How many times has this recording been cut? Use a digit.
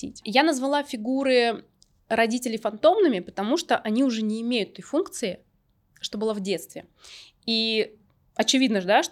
0